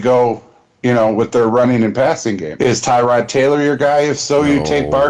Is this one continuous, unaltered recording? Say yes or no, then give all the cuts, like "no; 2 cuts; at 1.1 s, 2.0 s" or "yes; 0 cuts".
yes; 0 cuts